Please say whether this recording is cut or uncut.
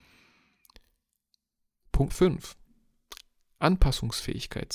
cut